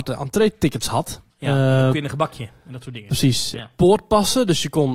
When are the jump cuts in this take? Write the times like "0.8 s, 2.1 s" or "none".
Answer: 1.3 s, 1.9 s